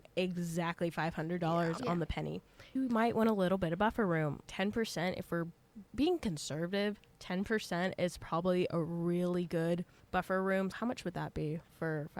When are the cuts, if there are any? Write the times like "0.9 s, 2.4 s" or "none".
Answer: 2.8 s, 4.4 s, 5.9 s, 10.0 s, 10.7 s

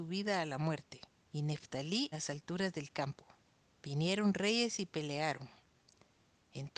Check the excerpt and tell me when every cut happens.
1.2 s, 2.1 s, 3.4 s

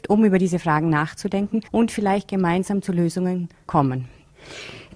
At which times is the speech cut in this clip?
1.7 s, 3.7 s

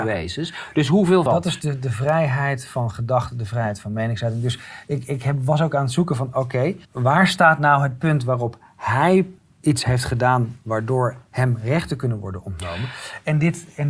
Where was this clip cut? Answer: 1.3 s, 6.8 s, 9.4 s

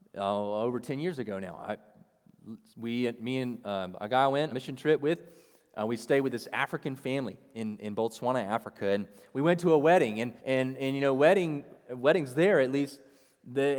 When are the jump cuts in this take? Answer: 4.5 s, 10.4 s, 11.9 s

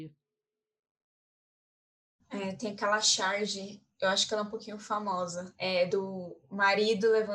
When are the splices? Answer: 3.9 s

